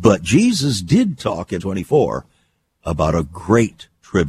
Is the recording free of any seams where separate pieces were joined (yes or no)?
no